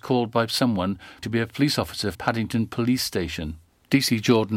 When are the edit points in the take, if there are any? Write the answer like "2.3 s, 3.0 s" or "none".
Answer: 1.2 s, 2.1 s